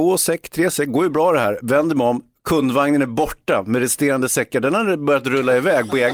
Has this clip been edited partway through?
no; 0 cuts

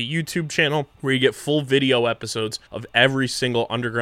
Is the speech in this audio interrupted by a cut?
yes; 2 cuts; at 0.9 s, 2.7 s

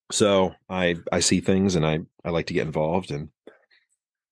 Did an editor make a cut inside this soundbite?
yes; 1 cut; at 2.1 s

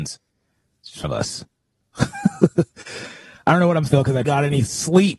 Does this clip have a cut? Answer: yes; 3 cuts; at 1.0 s, 3.9 s, 4.2 s

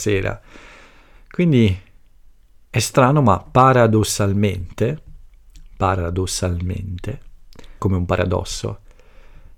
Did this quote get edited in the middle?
yes; 1 cut; at 7.8 s

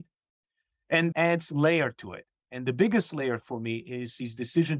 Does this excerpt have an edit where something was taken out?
yes; 1 cut; at 1.1 s

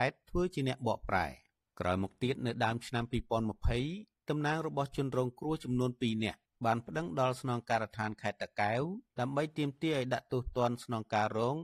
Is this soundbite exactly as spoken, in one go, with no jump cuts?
yes; 0 cuts

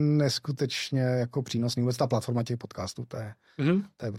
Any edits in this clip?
no; 0 cuts

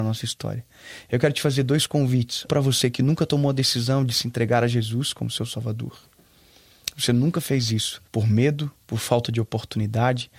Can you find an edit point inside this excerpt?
yes; 2 cuts; at 2.5 s, 8.1 s

